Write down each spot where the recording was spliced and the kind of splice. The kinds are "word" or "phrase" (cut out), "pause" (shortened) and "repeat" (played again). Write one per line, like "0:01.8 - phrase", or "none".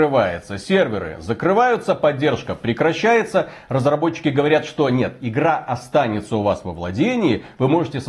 none